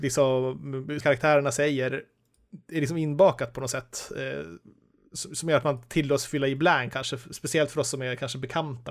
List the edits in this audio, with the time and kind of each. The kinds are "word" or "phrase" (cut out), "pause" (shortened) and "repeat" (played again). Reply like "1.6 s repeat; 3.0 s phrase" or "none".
1.0 s word; 6.9 s word